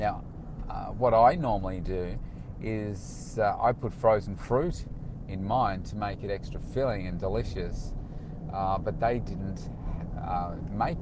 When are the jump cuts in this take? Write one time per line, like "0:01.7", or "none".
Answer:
none